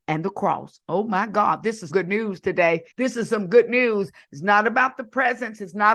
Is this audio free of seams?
no; 2 cuts; at 1.9 s, 2.9 s

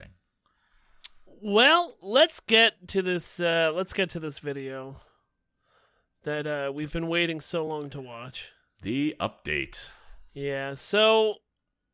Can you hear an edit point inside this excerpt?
no; 0 cuts

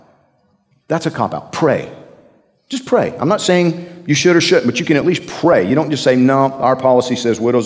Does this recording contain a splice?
no; 0 cuts

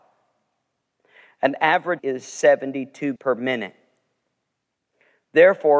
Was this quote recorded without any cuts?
no; 2 cuts; at 2.0 s, 3.2 s

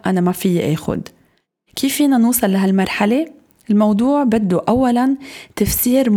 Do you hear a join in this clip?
no; 0 cuts

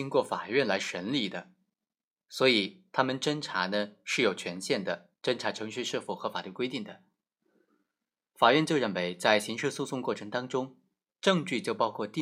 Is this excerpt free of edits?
yes; 0 cuts

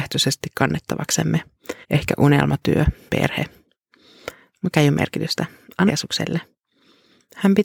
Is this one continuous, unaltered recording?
no; 4 cuts; at 1.8 s, 3.1 s, 4.7 s, 5.9 s

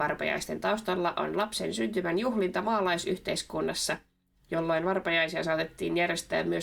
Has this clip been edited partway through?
no; 0 cuts

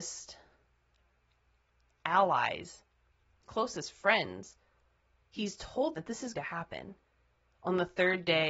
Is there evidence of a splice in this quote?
yes; 3 cuts; at 3.4 s, 6.0 s, 6.3 s

